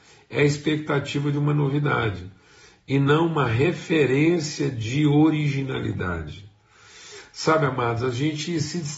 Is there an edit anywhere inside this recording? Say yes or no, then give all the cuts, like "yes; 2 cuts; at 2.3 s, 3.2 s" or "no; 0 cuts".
no; 0 cuts